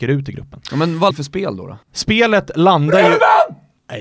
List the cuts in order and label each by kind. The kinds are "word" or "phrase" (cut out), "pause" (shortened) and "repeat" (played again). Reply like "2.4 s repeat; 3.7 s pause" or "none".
1.1 s phrase; 1.8 s pause